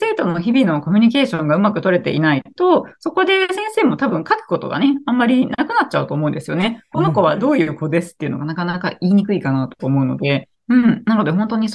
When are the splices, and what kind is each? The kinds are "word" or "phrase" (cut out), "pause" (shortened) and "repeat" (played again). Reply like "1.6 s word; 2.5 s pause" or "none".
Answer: none